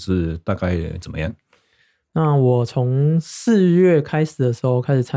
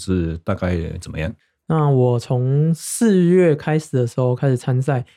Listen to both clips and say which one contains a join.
second; 1 cut; at 1.4 s

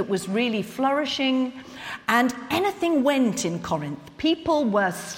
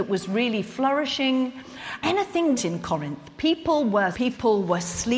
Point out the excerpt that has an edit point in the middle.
second; 3 cuts; at 2.0 s, 2.5 s, 4.1 s

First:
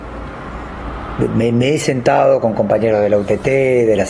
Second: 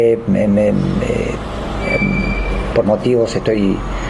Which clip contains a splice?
second; 1 cut; at 2.8 s

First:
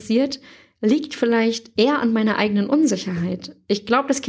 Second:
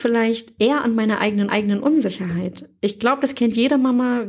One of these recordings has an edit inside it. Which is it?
second; 1 cut; at 1.5 s

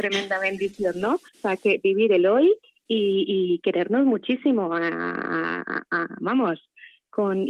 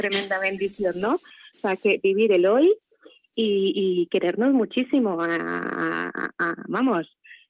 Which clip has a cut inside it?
first; 2 cuts; at 1.3 s, 2.6 s

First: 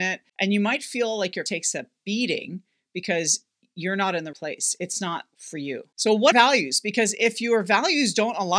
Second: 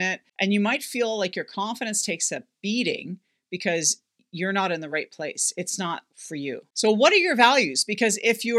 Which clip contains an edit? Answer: first; 3 cuts; at 1.5 s, 4.3 s, 6.3 s

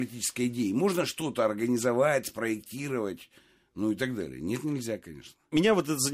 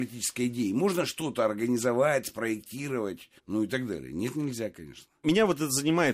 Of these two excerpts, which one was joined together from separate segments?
second; 1 cut; at 3.4 s

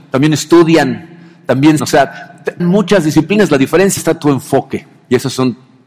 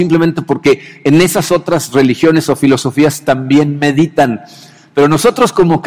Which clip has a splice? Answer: first; 3 cuts; at 1.8 s, 2.6 s, 4.0 s

